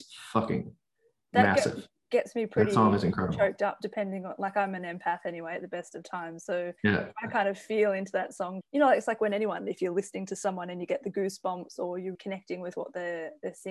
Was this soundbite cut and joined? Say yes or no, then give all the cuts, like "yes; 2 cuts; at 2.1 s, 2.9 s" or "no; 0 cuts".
yes; 3 cuts; at 6.8 s, 8.6 s, 12.1 s